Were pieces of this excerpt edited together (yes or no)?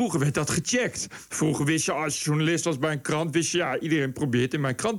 no